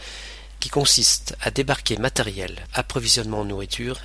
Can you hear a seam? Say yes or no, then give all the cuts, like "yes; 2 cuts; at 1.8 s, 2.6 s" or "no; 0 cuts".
yes; 1 cut; at 2.7 s